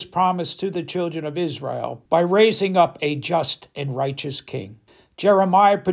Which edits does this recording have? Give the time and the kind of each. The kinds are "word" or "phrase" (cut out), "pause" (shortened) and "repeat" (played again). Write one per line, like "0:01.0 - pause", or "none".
0:02.1 - pause
0:04.9 - pause